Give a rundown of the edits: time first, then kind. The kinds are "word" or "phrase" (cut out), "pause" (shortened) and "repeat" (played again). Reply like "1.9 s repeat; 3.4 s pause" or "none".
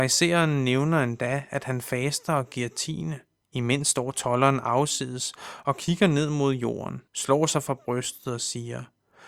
3.4 s pause; 7.1 s pause